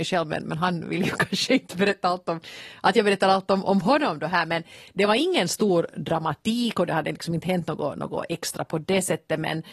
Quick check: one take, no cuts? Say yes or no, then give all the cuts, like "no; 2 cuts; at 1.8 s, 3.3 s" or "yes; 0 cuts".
yes; 0 cuts